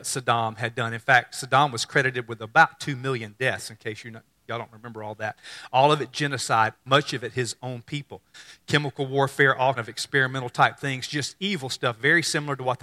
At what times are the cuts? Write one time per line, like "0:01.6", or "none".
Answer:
0:09.8